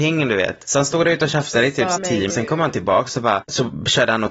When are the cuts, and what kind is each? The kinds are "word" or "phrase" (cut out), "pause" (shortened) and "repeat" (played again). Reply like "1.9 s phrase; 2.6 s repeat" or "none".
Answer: 2.0 s phrase; 2.3 s phrase